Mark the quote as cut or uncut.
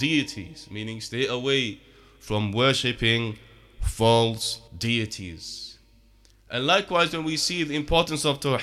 cut